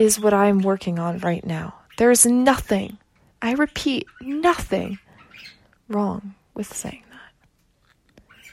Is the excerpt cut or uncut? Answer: uncut